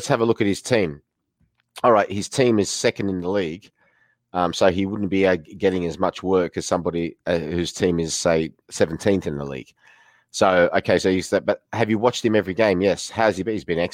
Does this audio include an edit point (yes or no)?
yes